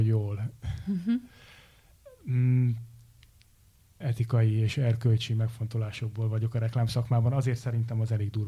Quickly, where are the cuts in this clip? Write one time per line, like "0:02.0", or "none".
0:04.0